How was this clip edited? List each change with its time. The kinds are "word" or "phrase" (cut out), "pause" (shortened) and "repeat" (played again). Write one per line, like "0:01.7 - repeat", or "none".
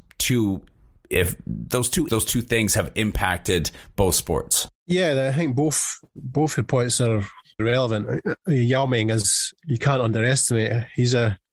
0:02.1 - word
0:04.7 - pause
0:07.6 - word
0:09.6 - pause

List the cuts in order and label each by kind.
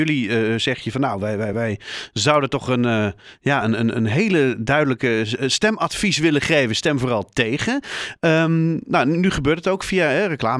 none

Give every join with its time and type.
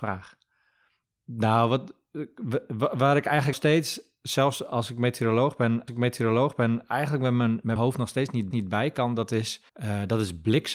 0:03.5 - word
0:05.9 - repeat
0:07.8 - word
0:08.5 - repeat
0:09.7 - pause

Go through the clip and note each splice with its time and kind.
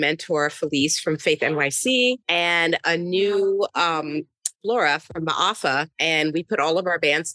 0:04.5 - phrase

